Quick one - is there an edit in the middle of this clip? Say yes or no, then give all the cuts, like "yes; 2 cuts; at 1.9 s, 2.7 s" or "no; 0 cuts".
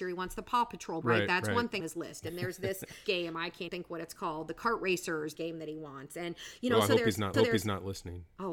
yes; 6 cuts; at 1.0 s, 1.8 s, 3.0 s, 3.7 s, 5.3 s, 7.3 s